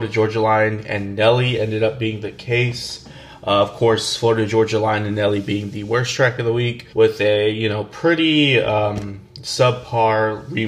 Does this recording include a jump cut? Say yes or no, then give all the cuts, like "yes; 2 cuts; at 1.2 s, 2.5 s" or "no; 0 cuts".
yes; 1 cut; at 6.9 s